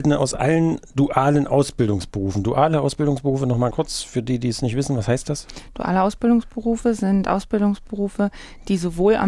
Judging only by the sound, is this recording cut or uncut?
cut